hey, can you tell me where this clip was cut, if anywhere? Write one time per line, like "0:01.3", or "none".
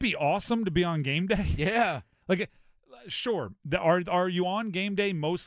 none

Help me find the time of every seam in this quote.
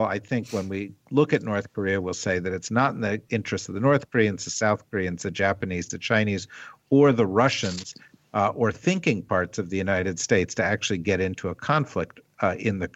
none

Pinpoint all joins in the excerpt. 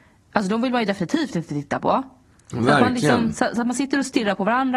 none

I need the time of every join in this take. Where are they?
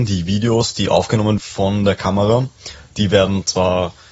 0:01.4

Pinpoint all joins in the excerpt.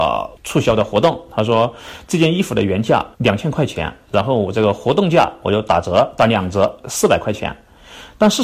0:03.1

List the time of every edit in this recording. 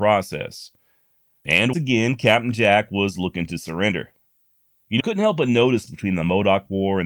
0:01.7
0:05.0
0:05.9

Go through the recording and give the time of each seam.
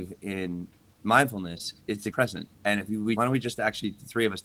0:01.8
0:02.1
0:02.5
0:03.2

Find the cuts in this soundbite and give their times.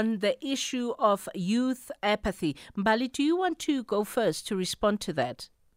none

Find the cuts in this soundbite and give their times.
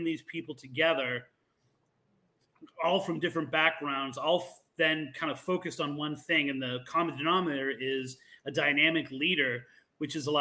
none

